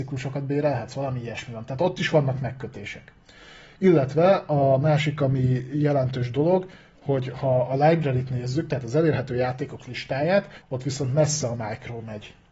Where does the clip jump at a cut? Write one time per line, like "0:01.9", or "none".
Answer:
0:10.6